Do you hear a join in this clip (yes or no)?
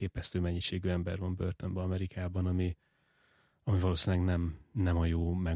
no